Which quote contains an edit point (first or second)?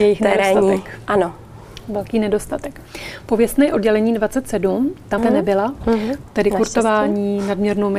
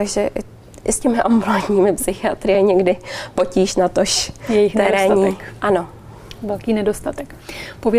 first